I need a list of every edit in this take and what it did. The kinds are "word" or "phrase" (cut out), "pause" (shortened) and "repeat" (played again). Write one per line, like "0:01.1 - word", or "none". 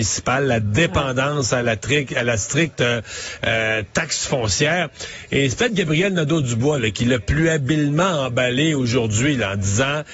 none